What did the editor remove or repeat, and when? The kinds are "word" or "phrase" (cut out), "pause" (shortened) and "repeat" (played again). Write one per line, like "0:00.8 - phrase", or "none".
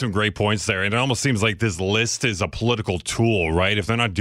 none